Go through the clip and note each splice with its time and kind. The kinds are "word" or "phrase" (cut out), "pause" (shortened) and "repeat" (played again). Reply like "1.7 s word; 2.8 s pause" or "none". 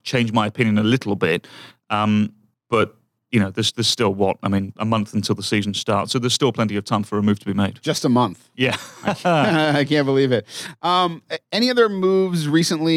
none